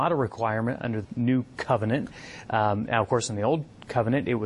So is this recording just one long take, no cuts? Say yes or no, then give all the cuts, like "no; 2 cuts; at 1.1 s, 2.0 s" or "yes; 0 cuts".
no; 1 cut; at 1.0 s